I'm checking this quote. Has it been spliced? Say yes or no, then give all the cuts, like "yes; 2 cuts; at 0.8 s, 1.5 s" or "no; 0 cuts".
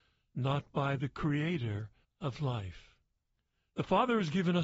yes; 2 cuts; at 2.0 s, 3.3 s